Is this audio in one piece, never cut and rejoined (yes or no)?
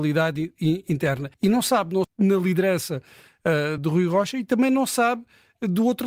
no